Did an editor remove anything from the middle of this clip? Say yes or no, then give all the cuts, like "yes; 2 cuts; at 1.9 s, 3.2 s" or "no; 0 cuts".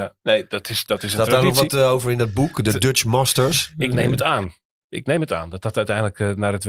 no; 0 cuts